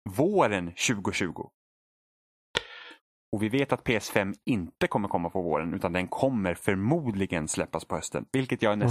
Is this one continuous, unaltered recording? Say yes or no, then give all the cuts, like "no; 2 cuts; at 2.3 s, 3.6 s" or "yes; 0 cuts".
yes; 0 cuts